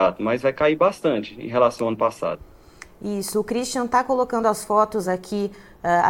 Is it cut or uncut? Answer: uncut